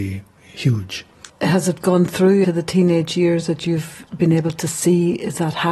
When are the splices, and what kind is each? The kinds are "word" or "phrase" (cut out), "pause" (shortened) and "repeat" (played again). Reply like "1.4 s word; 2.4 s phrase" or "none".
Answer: 2.4 s word